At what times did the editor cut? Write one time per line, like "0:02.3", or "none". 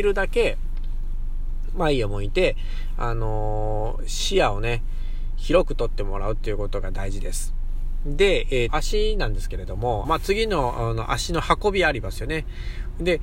0:08.7
0:10.0